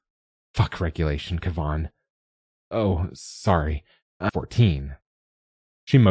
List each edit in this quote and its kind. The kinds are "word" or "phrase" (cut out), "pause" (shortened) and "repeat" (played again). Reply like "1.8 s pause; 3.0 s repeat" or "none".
4.3 s phrase